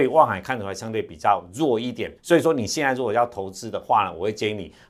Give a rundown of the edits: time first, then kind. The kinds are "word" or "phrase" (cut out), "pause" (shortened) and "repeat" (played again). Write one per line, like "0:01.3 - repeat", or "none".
0:02.2 - pause